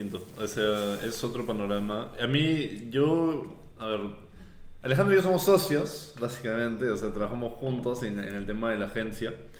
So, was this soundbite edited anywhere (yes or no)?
no